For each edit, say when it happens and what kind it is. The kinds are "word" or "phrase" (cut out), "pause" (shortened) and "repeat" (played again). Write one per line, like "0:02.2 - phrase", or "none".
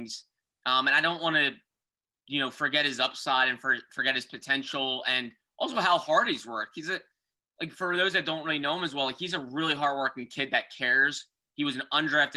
none